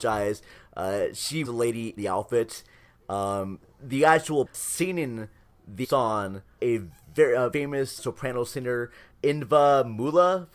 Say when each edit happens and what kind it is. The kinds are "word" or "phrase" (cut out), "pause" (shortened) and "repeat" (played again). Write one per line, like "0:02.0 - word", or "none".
0:01.4 - word
0:02.0 - word
0:04.5 - word
0:05.8 - word
0:06.6 - word
0:07.5 - word
0:08.0 - word
0:09.1 - word